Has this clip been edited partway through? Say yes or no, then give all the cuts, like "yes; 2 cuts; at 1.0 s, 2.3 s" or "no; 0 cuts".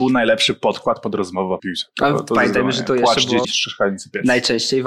yes; 2 cuts; at 1.6 s, 3.4 s